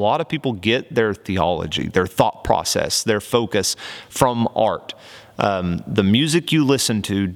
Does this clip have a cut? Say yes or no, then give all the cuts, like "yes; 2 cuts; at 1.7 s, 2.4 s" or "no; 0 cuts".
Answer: no; 0 cuts